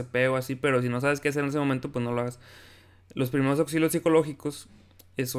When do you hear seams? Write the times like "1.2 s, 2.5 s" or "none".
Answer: none